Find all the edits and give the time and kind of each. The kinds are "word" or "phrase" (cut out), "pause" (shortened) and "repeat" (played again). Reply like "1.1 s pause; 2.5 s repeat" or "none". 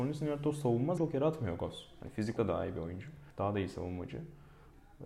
1.0 s word; 2.4 s word; 3.3 s pause